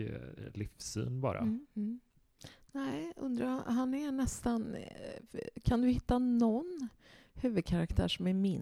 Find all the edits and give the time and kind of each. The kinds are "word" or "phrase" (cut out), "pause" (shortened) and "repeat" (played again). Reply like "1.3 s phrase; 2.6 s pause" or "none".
none

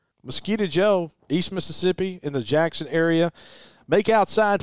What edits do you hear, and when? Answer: none

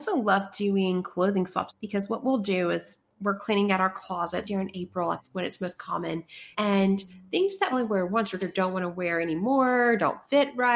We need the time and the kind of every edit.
1.7 s phrase; 4.4 s word; 5.2 s word; 6.5 s pause; 7.7 s word; 8.4 s word

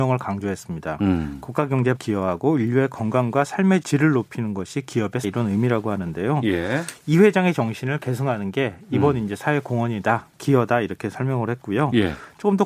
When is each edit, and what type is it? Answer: 1.9 s word; 3.8 s word; 5.2 s word

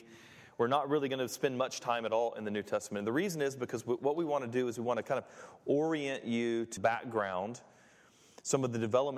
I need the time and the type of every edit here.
6.8 s word

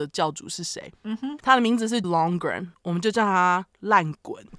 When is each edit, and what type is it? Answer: 2.0 s word

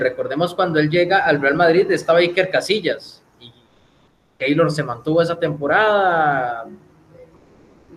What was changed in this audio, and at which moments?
none

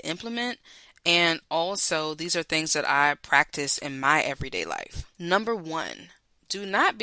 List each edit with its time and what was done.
5.1 s pause

